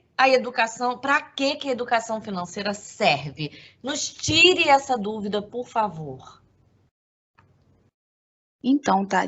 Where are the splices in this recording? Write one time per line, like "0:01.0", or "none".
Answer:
none